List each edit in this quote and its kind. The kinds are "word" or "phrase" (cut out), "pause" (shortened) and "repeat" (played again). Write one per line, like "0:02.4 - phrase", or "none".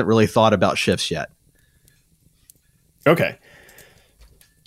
none